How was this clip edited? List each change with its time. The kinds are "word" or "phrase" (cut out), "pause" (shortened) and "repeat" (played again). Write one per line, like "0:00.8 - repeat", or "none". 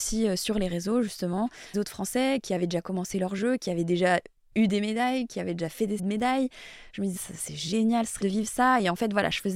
0:01.7 - word
0:06.0 - word
0:07.2 - word
0:08.2 - word